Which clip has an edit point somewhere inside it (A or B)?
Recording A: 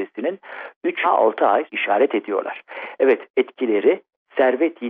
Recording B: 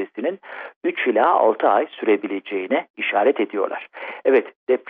A